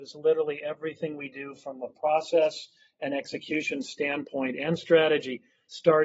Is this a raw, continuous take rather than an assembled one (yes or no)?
yes